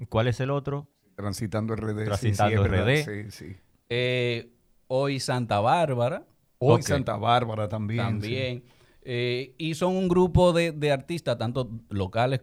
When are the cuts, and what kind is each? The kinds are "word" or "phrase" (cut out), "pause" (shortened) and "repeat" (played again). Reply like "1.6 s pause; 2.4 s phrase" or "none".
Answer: none